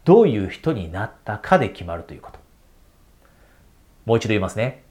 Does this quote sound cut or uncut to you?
uncut